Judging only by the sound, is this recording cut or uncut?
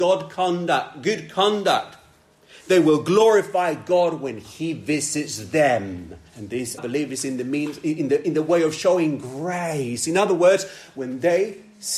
cut